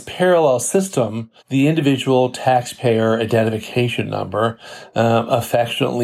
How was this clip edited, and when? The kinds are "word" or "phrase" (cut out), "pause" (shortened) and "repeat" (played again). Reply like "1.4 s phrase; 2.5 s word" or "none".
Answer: 1.4 s pause